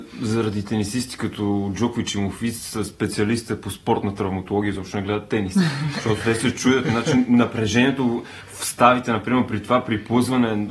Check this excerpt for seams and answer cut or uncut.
uncut